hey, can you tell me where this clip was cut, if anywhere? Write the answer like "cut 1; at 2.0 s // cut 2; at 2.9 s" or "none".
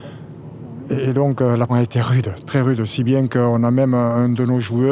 cut 1; at 1.7 s